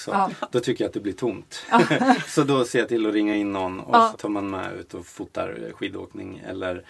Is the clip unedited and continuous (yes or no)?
no